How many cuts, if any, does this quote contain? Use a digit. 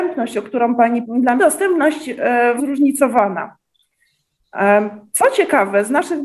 3